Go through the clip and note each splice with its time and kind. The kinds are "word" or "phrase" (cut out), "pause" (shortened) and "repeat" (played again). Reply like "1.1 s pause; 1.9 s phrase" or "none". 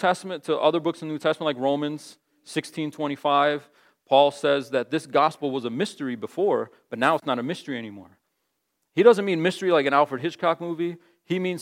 none